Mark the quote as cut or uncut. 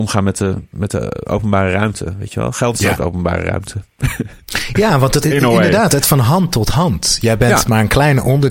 cut